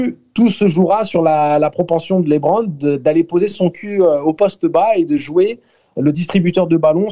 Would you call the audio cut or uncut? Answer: uncut